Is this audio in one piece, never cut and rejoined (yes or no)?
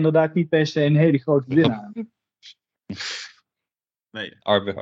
yes